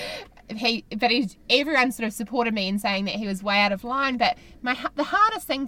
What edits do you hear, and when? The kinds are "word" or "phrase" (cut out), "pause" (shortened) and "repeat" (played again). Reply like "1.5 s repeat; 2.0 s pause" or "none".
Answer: none

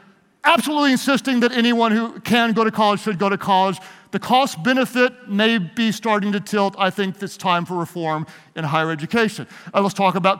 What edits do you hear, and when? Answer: none

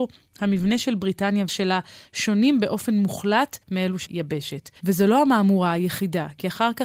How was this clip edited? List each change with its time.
1.5 s word; 3.6 s pause; 4.1 s word; 4.8 s pause

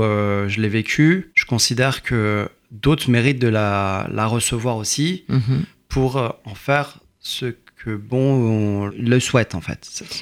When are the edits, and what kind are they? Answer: 1.3 s pause; 8.9 s word

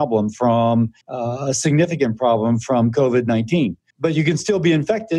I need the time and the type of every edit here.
1.0 s pause; 3.9 s pause

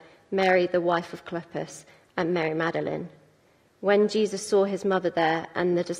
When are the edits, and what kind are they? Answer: none

